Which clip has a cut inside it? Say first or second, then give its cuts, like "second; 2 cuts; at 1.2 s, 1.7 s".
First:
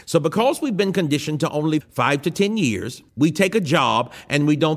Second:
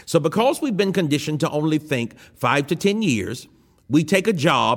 first; 2 cuts; at 1.8 s, 3.1 s